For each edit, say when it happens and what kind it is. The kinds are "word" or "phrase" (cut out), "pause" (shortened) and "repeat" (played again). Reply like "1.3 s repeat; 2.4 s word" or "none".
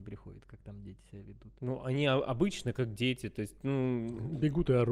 1.6 s pause